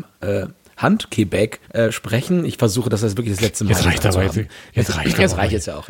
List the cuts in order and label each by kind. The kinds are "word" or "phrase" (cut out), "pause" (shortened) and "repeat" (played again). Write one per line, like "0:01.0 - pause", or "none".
0:01.6 - pause